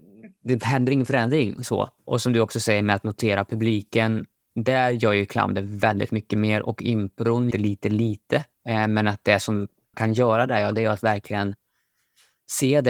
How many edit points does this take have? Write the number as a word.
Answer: four